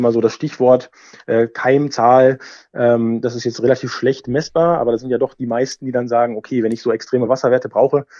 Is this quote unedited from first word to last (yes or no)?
yes